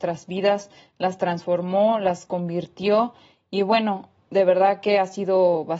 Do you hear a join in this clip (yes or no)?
no